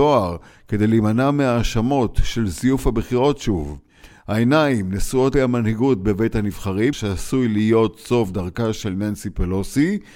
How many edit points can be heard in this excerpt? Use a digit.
2